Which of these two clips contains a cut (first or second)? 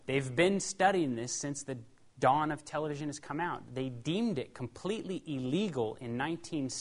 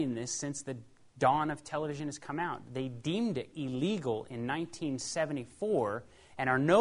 second